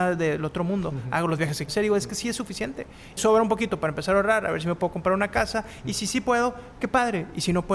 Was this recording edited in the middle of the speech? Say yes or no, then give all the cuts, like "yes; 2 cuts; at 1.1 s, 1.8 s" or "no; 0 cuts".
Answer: yes; 2 cuts; at 1.7 s, 3.2 s